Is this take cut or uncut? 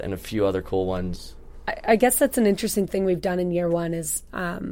uncut